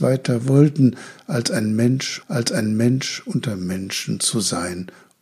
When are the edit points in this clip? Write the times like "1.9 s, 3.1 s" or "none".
2.2 s